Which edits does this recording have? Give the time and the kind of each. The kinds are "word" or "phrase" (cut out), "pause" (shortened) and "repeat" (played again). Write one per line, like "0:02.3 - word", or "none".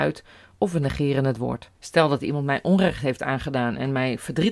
0:01.7 - pause